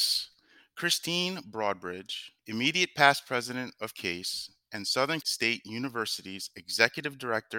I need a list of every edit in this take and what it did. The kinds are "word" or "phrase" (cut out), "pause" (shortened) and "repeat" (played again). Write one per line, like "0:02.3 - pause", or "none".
0:02.4 - pause
0:05.2 - word